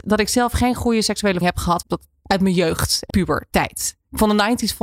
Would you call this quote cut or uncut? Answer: cut